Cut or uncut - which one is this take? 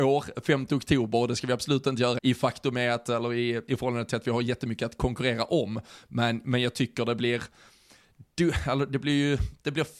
cut